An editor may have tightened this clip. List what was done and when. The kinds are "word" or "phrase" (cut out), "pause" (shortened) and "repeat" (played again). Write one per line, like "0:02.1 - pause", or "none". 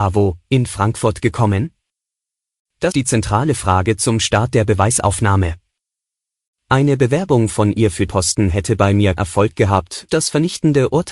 0:02.9 - word
0:08.1 - word
0:09.2 - word
0:10.1 - word